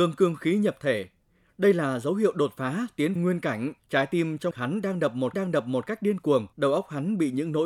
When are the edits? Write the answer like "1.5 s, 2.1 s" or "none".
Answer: 3.2 s, 3.8 s, 4.5 s, 5.3 s, 6.5 s